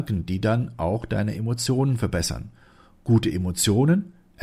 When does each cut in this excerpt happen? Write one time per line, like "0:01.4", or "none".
none